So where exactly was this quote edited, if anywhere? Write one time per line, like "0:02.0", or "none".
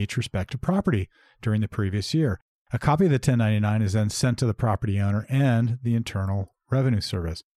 none